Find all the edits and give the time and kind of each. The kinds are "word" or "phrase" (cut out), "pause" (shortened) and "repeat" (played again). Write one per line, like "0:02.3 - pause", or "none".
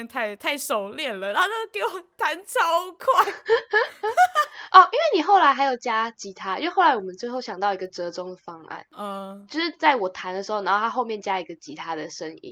none